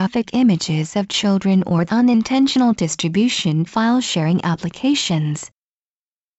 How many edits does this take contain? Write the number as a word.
two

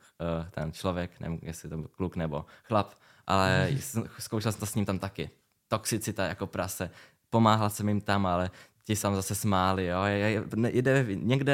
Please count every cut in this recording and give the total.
one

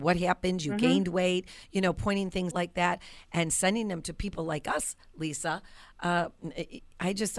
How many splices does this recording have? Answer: one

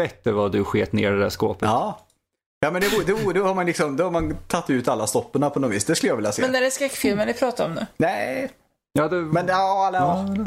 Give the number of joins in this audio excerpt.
zero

